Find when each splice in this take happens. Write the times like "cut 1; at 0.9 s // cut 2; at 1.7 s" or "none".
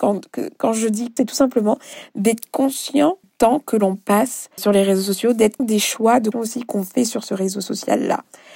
cut 1; at 1.2 s // cut 2; at 3.2 s // cut 3; at 4.6 s // cut 4; at 5.6 s // cut 5; at 6.3 s